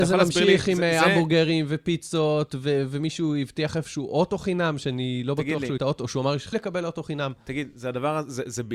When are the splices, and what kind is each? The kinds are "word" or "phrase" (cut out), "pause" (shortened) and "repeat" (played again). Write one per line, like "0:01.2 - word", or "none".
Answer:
0:05.8 - phrase
0:06.5 - word